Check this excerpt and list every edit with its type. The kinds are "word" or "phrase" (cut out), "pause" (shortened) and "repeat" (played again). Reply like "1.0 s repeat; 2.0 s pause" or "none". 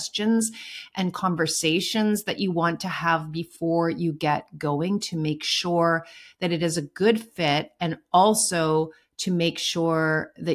none